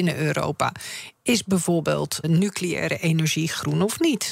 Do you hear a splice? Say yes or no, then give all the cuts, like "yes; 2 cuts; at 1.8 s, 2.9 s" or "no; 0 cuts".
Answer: yes; 1 cut; at 2.2 s